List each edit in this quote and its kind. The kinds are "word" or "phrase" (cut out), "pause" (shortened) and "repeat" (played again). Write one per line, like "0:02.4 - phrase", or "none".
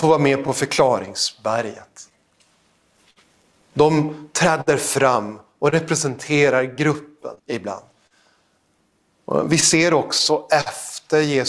0:07.4 - pause